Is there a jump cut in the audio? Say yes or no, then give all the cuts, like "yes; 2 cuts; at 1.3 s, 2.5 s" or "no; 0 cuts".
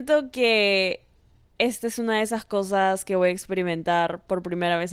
no; 0 cuts